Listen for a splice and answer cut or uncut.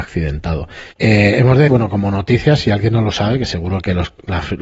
cut